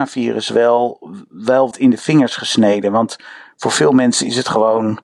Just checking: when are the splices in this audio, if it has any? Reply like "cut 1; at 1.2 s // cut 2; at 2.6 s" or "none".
cut 1; at 1.7 s